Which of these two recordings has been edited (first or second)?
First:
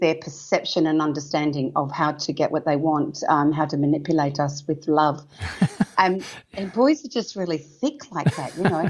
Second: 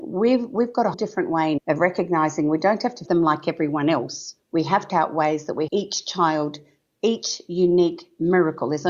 second